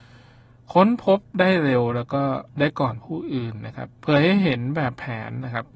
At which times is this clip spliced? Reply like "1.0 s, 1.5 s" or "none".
2.5 s, 3.9 s

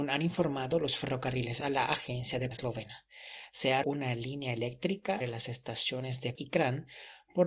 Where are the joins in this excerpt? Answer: 1.6 s, 2.5 s, 3.8 s, 5.2 s, 6.3 s

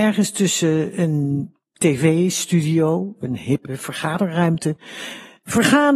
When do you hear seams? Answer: none

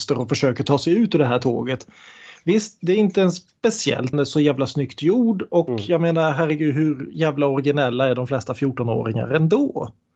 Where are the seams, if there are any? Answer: 4.1 s

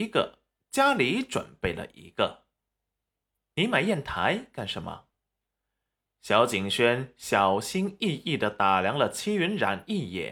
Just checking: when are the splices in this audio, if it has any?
none

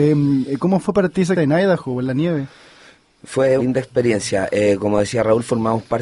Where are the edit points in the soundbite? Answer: 1.3 s, 3.6 s

